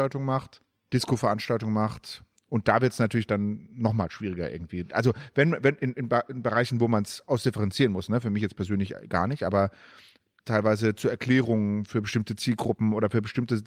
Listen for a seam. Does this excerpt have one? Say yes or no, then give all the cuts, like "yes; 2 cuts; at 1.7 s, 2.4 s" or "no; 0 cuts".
no; 0 cuts